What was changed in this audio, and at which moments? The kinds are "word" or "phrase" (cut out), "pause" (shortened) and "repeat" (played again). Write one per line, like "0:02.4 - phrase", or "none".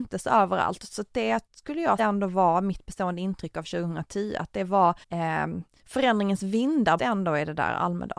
0:01.5 - pause
0:02.0 - word
0:05.0 - pause
0:07.0 - word